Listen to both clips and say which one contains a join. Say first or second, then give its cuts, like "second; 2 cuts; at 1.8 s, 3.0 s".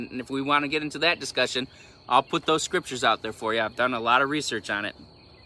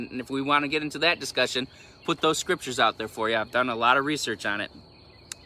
second; 1 cut; at 2.0 s